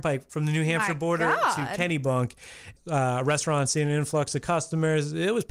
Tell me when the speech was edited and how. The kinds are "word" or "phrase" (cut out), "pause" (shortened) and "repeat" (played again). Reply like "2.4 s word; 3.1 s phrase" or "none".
none